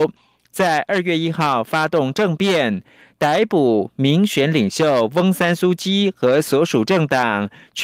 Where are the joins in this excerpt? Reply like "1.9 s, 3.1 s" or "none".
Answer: none